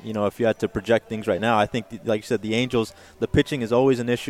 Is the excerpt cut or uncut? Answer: uncut